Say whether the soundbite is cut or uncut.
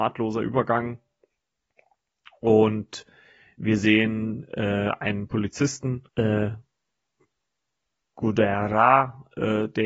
cut